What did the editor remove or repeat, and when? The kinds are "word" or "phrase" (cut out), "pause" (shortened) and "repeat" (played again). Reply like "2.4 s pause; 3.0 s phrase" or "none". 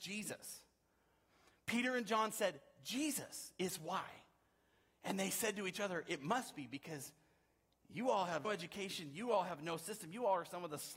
8.4 s word